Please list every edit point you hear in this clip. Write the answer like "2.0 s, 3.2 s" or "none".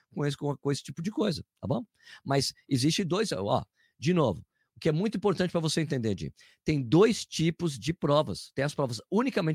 none